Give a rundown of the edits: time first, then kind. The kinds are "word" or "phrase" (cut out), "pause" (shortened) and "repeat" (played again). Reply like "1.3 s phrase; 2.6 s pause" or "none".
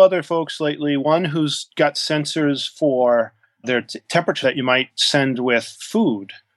3.6 s word; 4.4 s word